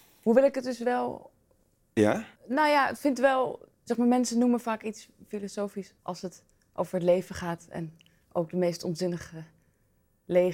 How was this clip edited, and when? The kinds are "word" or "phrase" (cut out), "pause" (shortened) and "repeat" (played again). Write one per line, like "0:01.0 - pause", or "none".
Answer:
0:02.4 - pause
0:03.7 - pause
0:06.0 - pause